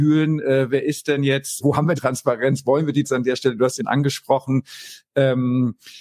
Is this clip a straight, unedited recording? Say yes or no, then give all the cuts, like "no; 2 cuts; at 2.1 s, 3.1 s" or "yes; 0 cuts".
no; 4 cuts; at 1.6 s, 1.9 s, 3.0 s, 3.8 s